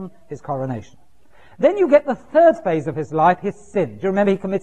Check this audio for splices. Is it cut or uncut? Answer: uncut